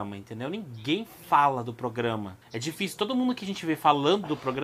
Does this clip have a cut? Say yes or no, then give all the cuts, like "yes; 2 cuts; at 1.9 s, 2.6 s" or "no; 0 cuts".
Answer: yes; 1 cut; at 2.4 s